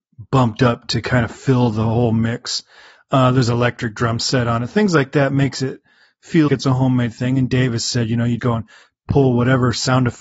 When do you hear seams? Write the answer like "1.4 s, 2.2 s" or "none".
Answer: 6.5 s, 8.4 s